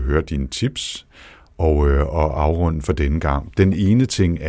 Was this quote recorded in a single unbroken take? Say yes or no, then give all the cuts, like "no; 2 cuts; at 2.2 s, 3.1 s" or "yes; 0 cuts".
yes; 0 cuts